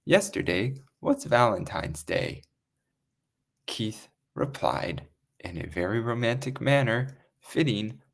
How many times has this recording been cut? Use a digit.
0